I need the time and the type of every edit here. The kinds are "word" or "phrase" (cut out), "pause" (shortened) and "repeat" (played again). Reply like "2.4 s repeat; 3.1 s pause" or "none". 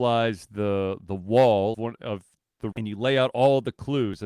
1.7 s word; 2.7 s word